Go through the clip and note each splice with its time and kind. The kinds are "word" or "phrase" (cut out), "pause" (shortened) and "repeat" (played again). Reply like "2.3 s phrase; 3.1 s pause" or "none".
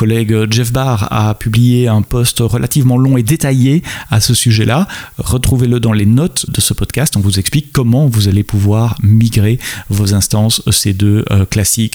6.5 s word